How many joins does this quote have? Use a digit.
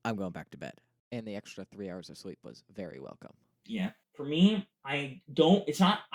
2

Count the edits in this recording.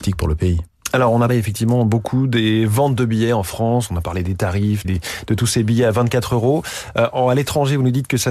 2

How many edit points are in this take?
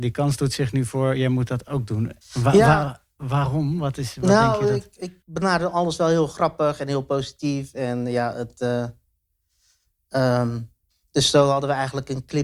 3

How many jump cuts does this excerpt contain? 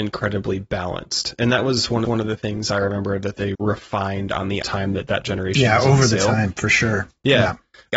3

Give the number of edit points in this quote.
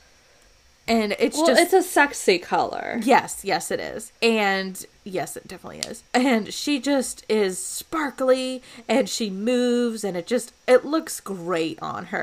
2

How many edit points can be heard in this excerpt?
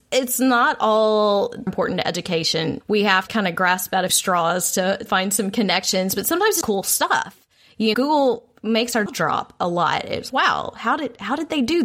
9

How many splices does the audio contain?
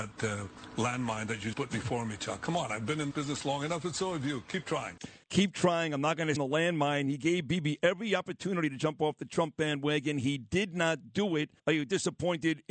5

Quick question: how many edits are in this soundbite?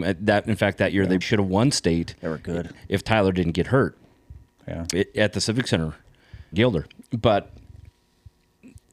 3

